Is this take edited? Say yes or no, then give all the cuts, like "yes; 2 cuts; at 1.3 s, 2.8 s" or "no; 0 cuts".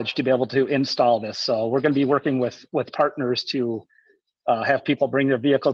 no; 0 cuts